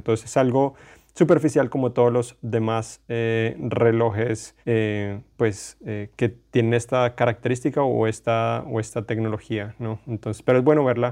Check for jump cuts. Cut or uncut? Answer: cut